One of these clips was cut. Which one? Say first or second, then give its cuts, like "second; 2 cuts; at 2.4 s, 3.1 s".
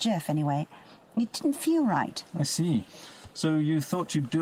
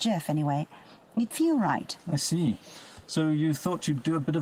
second; 1 cut; at 1.3 s